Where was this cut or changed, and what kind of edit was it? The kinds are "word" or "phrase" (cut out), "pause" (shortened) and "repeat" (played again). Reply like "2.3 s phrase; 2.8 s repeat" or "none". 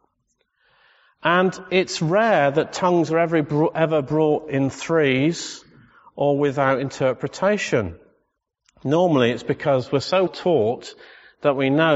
10.3 s word